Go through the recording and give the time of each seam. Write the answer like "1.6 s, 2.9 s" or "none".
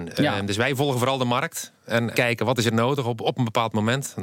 2.1 s